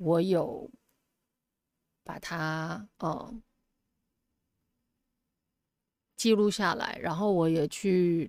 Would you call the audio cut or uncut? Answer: cut